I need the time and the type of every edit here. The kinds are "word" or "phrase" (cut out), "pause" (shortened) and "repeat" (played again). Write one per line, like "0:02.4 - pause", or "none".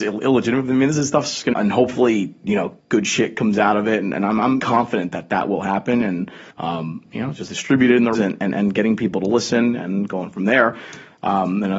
0:01.5 - phrase
0:02.8 - pause
0:04.6 - word
0:06.5 - pause
0:07.5 - phrase
0:08.1 - phrase

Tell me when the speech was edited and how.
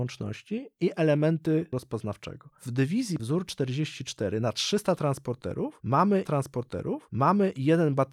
0:01.7 - word
0:03.2 - word
0:06.2 - repeat

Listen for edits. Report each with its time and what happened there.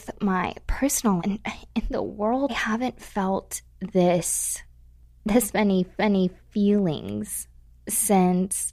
0:01.2 - word
0:02.5 - phrase
0:06.0 - repeat

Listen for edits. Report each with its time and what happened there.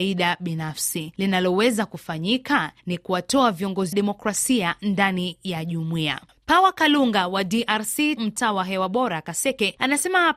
0:02.8 - pause
0:03.9 - phrase
0:08.2 - phrase

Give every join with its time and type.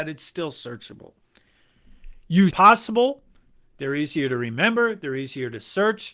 0:02.5 - phrase

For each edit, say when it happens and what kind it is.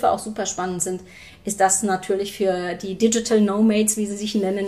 none

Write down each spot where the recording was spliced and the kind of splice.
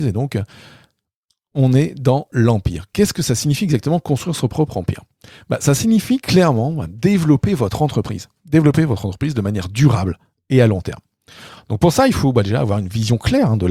none

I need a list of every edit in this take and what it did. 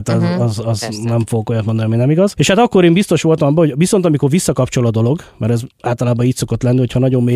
none

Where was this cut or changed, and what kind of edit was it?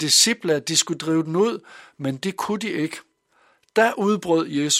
none

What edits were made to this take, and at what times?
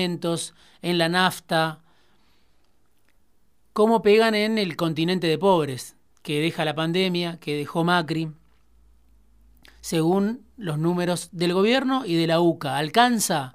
none

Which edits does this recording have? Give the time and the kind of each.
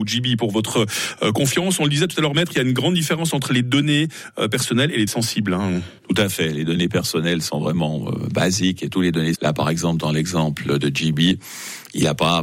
0:05.1 - word
0:06.0 - pause
0:09.3 - word
0:10.8 - word

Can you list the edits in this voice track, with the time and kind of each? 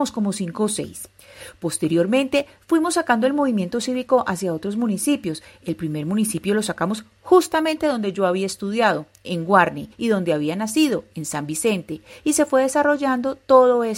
0:09.9 - pause

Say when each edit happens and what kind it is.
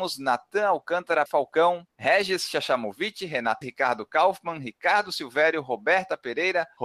0:01.3 - word
0:03.6 - word

